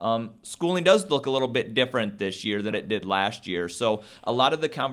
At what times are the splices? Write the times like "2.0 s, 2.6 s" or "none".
2.7 s